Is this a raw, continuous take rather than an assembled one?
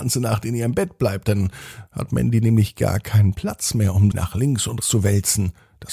no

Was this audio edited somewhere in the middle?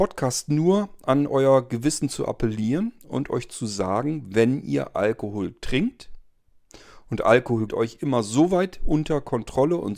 yes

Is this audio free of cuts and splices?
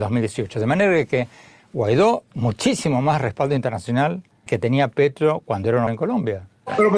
no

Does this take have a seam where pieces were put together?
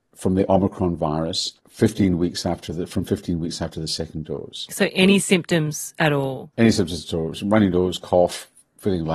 yes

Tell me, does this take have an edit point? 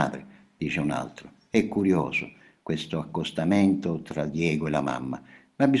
no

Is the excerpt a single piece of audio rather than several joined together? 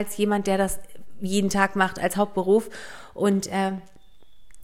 yes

